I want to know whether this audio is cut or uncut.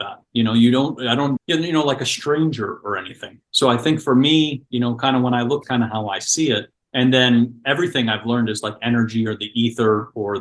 cut